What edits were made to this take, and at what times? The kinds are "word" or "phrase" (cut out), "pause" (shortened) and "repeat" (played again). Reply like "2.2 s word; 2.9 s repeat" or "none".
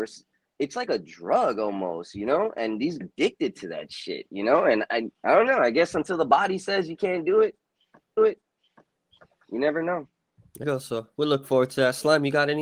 3.0 s phrase; 5.1 s pause; 8.2 s repeat; 10.6 s word